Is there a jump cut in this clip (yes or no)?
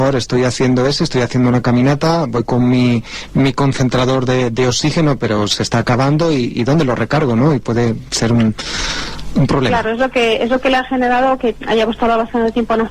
no